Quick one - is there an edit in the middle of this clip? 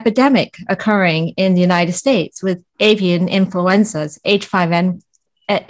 yes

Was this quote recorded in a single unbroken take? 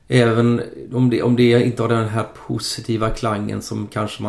yes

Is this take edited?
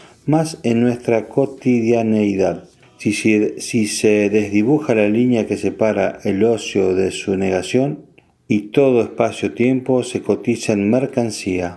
no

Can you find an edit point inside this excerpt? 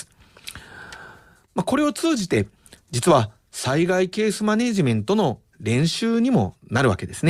no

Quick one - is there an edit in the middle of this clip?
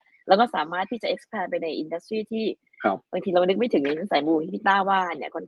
no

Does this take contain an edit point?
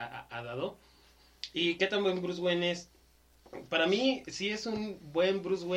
no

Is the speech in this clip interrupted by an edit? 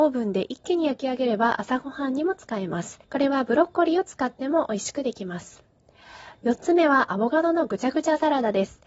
yes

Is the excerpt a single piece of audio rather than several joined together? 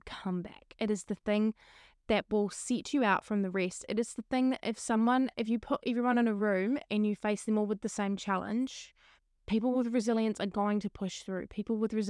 yes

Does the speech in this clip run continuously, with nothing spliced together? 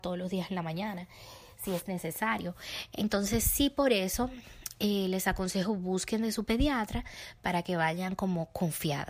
yes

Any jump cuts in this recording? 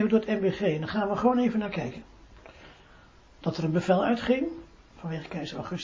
no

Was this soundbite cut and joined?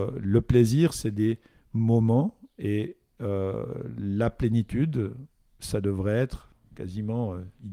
no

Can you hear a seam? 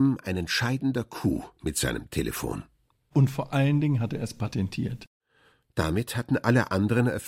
no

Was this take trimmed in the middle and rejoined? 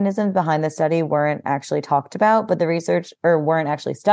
no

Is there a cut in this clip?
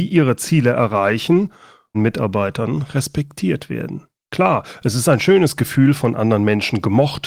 yes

